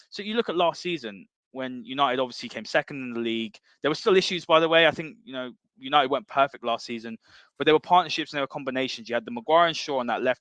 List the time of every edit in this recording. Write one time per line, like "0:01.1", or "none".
0:05.6